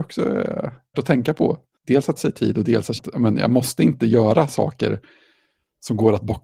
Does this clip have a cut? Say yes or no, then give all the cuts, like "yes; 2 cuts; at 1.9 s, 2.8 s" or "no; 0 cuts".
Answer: yes; 3 cuts; at 0.9 s, 2.2 s, 3.0 s